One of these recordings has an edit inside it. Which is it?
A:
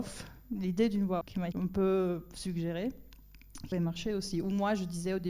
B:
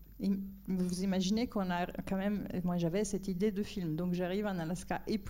A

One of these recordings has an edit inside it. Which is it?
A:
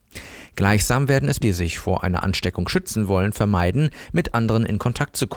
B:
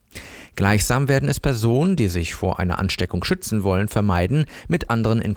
A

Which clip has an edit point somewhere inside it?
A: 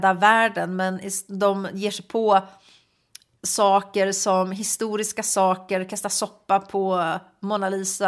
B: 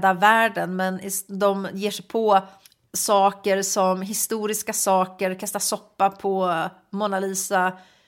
B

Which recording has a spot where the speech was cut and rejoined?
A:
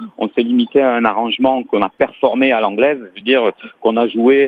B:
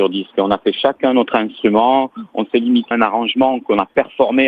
B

